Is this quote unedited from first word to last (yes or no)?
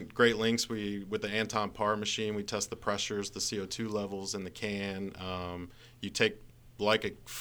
yes